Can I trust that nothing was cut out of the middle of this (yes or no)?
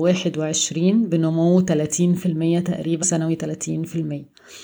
no